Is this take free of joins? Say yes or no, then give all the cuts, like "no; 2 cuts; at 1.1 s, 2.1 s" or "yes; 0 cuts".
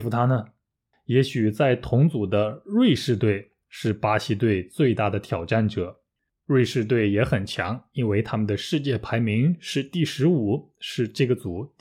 yes; 0 cuts